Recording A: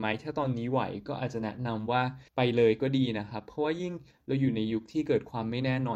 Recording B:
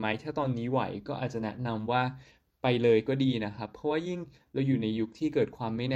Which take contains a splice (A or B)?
A